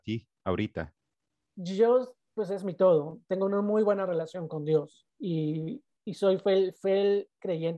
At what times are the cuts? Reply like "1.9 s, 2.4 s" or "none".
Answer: 5.1 s

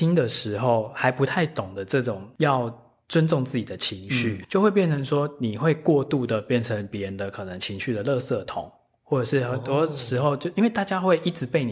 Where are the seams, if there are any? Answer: 4.4 s

